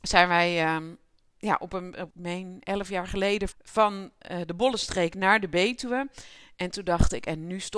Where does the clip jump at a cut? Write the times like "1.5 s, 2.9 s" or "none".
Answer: 2.1 s, 3.5 s

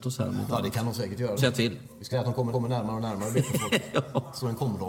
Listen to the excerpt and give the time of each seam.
1.4 s, 2.1 s, 2.5 s

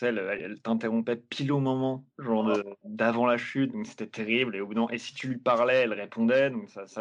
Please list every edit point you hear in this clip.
2.1 s

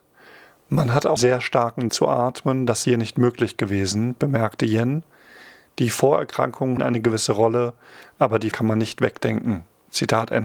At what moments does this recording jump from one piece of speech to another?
1.2 s, 1.9 s, 2.8 s, 6.8 s, 8.5 s

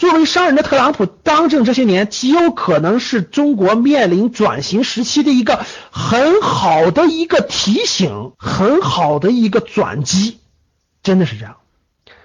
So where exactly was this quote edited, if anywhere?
8.3 s

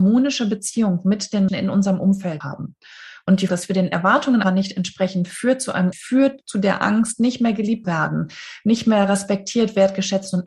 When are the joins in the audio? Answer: 1.5 s, 2.4 s, 3.5 s, 4.4 s, 5.9 s, 7.8 s

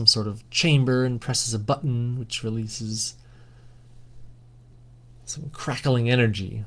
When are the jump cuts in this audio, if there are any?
none

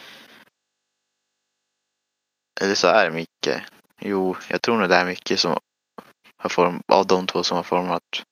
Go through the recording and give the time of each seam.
none

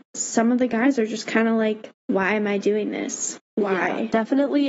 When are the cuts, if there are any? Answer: 2.0 s, 3.5 s

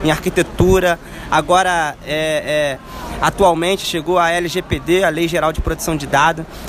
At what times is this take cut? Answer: 3.8 s

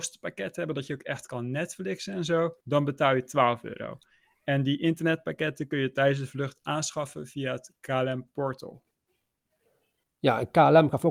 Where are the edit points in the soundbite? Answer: 2.6 s

